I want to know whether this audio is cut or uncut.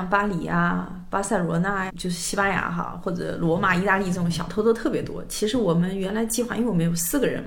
cut